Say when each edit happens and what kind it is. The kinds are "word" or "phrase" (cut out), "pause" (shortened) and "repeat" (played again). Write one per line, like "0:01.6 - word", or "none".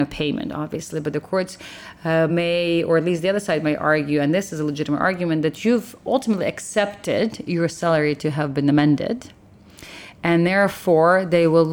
none